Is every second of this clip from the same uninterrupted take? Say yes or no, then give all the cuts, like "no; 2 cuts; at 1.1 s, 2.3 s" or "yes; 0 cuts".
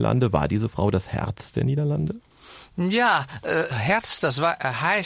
no; 1 cut; at 3.7 s